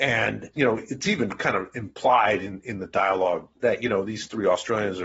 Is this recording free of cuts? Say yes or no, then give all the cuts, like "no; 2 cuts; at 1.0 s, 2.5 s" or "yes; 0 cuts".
no; 1 cut; at 3.5 s